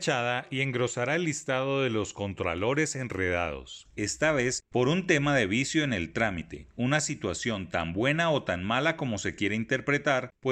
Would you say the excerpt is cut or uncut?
uncut